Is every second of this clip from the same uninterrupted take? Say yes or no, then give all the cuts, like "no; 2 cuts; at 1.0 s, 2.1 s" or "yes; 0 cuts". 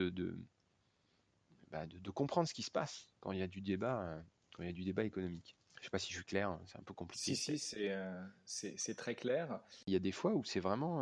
no; 1 cut; at 5.6 s